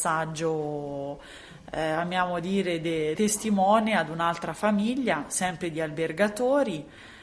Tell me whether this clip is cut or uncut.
cut